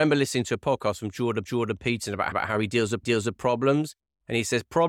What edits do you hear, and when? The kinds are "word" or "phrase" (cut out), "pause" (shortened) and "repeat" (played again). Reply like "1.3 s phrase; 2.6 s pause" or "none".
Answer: 1.5 s repeat; 2.3 s repeat; 3.0 s repeat

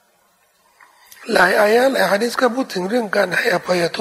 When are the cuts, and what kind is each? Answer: none

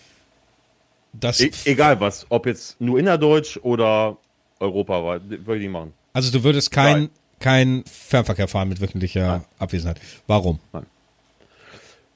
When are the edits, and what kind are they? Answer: 2.8 s word; 7.9 s word

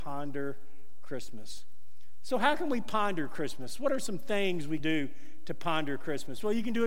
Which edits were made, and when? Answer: 4.8 s word

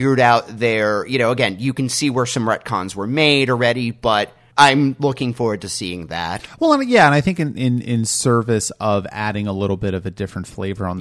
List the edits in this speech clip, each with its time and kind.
4.5 s pause

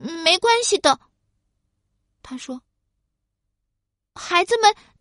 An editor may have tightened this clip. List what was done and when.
none

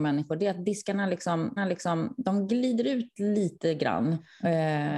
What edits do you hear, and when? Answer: 1.6 s repeat

